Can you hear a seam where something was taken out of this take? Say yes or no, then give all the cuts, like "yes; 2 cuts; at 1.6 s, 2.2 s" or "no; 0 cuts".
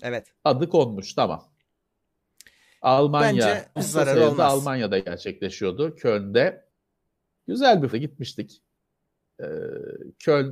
yes; 2 cuts; at 3.8 s, 7.9 s